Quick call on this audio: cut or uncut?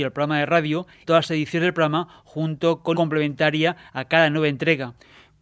cut